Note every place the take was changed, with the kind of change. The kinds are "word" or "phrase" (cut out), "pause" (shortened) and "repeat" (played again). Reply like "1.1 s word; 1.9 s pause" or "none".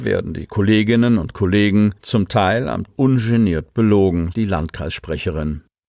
2.0 s pause; 2.9 s word; 4.3 s word